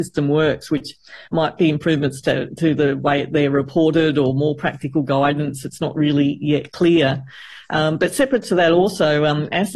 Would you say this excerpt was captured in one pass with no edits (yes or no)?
yes